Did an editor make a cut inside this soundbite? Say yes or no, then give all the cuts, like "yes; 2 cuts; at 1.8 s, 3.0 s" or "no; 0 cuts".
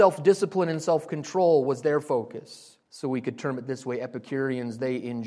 yes; 1 cut; at 2.8 s